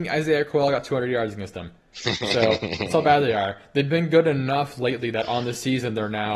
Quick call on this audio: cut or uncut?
uncut